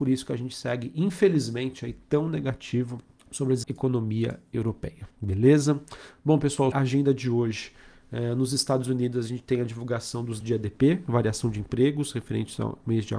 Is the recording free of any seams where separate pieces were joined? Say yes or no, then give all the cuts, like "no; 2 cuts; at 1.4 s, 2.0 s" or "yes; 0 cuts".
no; 5 cuts; at 3.2 s, 3.6 s, 5.1 s, 6.7 s, 10.4 s